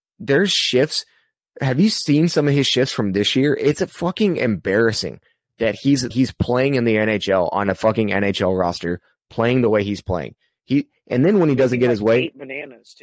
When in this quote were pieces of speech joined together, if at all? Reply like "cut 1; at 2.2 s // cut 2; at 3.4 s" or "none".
cut 1; at 6.1 s